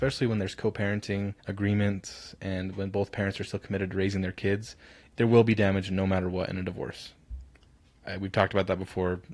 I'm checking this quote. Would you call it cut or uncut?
cut